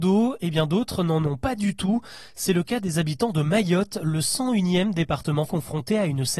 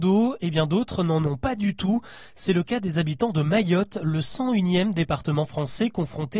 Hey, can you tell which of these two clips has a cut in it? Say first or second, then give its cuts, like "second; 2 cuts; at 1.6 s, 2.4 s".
first; 1 cut; at 5.5 s